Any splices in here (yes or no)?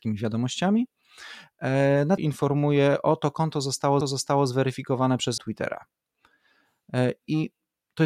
yes